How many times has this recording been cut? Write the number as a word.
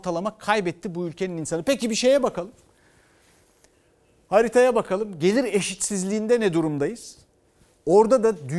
zero